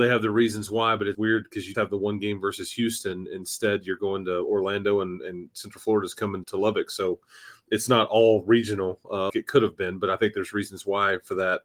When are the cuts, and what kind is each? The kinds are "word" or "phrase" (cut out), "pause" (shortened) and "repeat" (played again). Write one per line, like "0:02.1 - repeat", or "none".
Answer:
0:01.1 - word
0:01.7 - word
0:06.4 - word
0:09.3 - word